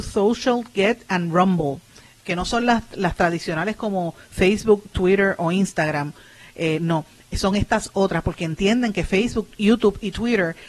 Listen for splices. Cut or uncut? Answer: uncut